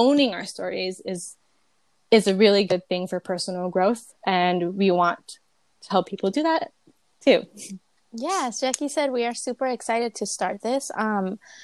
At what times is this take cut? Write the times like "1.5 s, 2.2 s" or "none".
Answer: 4.2 s

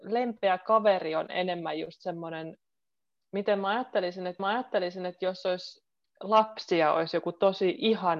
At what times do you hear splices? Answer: 4.4 s, 6.0 s

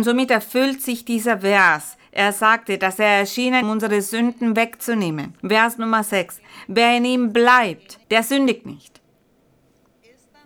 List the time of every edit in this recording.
3.6 s, 5.4 s, 8.0 s

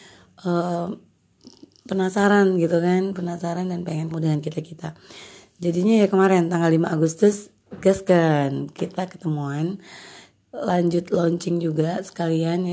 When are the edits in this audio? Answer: 4.1 s

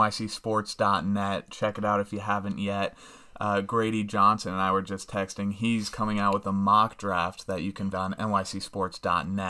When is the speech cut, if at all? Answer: 7.9 s

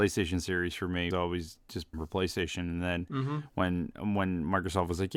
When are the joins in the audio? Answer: 1.1 s, 1.9 s

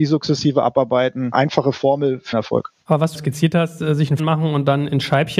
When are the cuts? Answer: 2.3 s, 3.1 s, 4.2 s

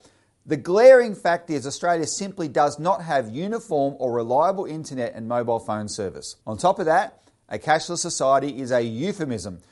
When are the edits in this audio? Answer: 6.4 s

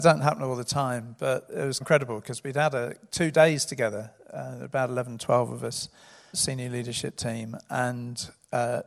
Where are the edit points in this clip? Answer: 1.8 s, 6.3 s

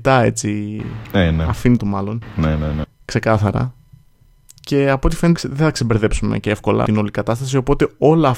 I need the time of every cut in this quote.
1.8 s, 5.3 s, 6.8 s

